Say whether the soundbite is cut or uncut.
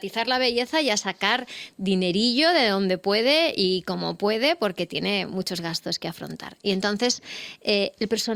uncut